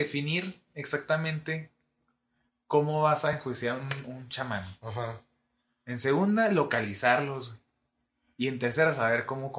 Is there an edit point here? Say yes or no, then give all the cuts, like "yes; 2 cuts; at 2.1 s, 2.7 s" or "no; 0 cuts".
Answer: no; 0 cuts